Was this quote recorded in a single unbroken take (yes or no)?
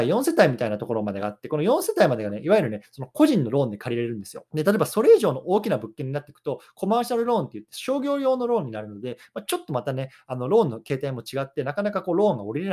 no